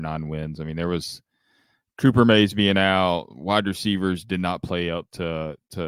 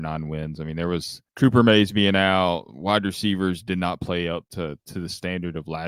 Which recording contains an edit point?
second; 2 cuts; at 1.3 s, 4.5 s

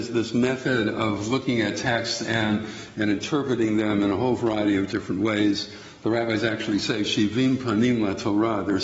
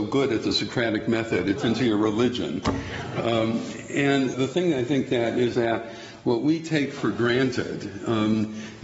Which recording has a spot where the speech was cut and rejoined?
second; 3 cuts; at 1.6 s, 4.3 s, 5.5 s

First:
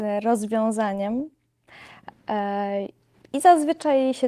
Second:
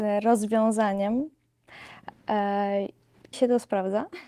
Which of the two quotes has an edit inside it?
second; 1 cut; at 3.3 s

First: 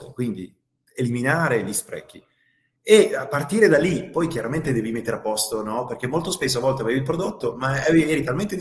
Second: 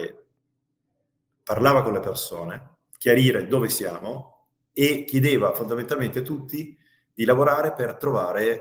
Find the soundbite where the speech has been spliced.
second; 1 cut; at 2.9 s

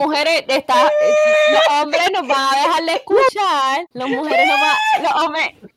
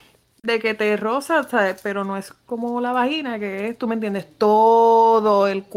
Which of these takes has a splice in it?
first; 1 cut; at 3.9 s

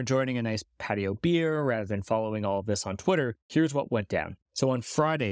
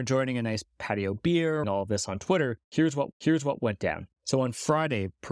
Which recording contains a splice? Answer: second; 2 cuts; at 1.6 s, 3.1 s

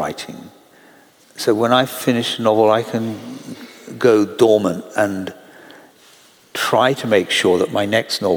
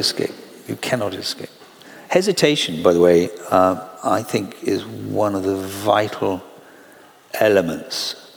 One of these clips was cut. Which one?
second; 1 cut; at 1.8 s

